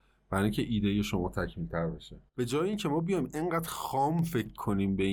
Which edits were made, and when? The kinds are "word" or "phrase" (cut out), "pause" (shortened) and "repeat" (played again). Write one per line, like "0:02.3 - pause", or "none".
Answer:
0:02.3 - pause